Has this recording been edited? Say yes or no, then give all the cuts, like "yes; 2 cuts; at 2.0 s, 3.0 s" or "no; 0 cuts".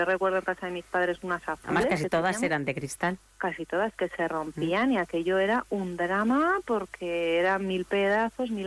yes; 1 cut; at 3.3 s